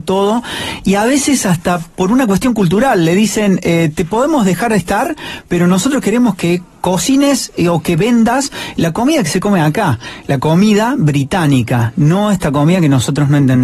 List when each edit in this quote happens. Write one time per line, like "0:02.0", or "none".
none